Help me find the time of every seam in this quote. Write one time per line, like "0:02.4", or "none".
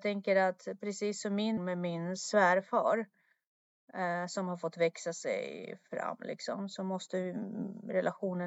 0:01.6